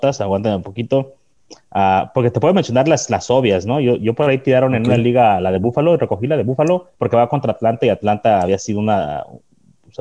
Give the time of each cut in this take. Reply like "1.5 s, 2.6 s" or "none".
7.0 s

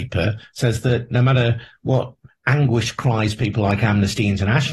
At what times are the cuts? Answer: none

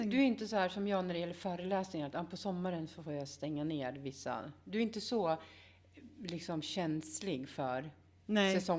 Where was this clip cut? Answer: none

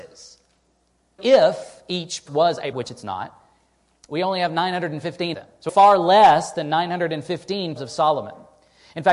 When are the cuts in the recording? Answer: 1.2 s, 2.3 s, 2.7 s, 5.3 s, 5.7 s, 7.8 s

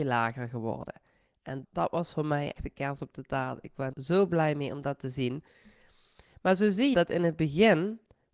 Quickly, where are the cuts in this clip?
1.6 s, 2.6 s, 3.9 s, 6.9 s

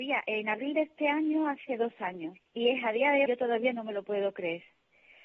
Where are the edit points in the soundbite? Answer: 2.5 s, 3.3 s

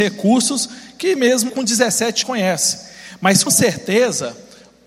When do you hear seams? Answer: 1.2 s, 1.5 s, 2.2 s, 3.5 s

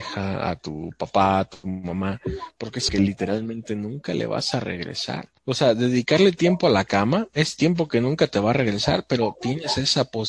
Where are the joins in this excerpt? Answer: 2.9 s, 5.4 s

